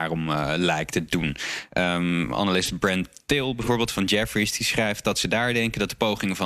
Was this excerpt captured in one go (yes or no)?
yes